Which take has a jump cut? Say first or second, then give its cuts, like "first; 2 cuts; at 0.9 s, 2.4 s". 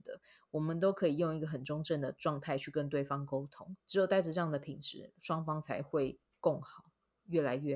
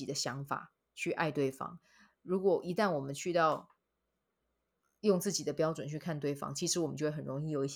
first; 1 cut; at 3.8 s